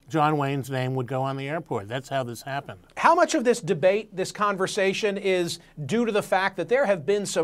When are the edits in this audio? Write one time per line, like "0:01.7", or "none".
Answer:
0:02.9